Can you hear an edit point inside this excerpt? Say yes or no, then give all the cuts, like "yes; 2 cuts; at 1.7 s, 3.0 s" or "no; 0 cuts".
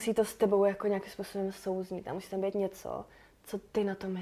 no; 0 cuts